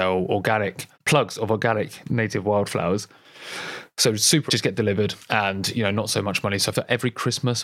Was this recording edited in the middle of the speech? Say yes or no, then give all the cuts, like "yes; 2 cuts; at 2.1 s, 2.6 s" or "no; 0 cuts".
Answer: yes; 3 cuts; at 0.9 s, 4.5 s, 6.7 s